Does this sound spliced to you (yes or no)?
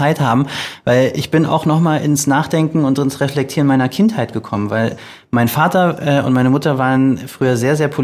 no